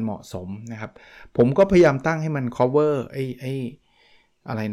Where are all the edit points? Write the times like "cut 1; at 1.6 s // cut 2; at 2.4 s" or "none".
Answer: none